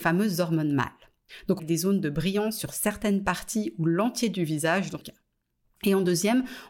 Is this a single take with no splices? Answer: no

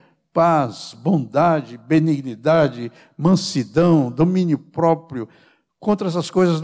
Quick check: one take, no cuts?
yes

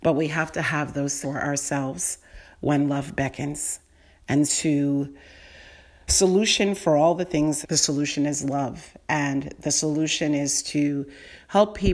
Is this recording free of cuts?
no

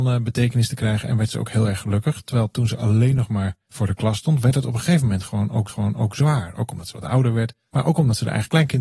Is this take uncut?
no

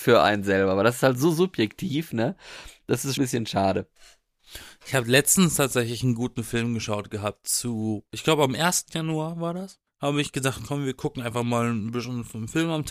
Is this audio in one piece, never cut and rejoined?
no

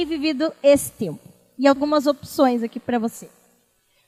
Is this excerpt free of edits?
no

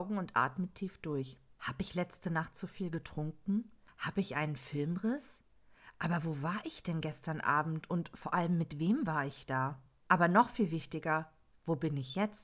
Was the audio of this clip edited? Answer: no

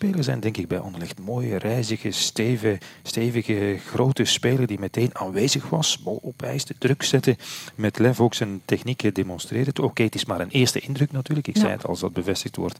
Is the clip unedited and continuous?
yes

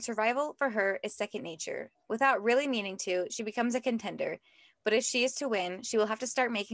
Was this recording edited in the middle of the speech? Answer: no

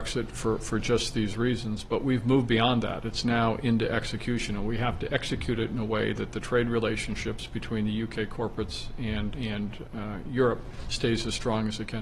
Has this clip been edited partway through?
yes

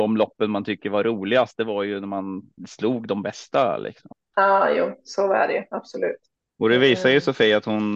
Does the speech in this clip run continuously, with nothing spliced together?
no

